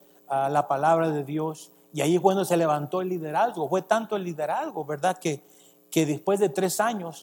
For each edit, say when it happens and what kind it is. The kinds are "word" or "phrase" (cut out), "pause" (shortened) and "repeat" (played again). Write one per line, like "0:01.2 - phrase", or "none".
none